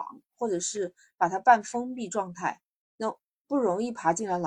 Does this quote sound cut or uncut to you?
uncut